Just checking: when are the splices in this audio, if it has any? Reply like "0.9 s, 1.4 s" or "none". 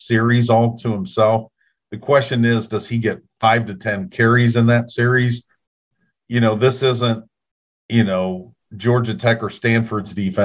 none